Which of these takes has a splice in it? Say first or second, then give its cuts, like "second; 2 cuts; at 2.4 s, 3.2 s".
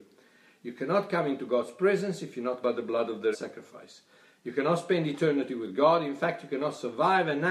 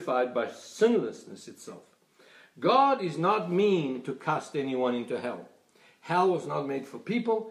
first; 2 cuts; at 2.6 s, 3.3 s